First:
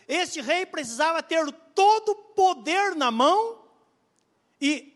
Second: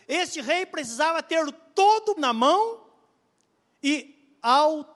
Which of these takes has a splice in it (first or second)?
second